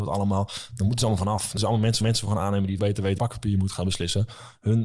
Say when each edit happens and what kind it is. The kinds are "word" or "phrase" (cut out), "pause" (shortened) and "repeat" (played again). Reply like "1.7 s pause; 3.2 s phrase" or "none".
1.6 s word; 2.0 s repeat; 2.8 s word; 3.2 s word